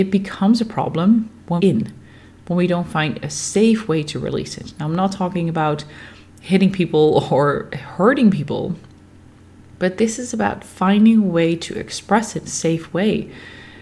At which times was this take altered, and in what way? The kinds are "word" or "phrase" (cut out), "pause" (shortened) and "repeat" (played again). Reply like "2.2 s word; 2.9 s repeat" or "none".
1.6 s phrase; 12.4 s word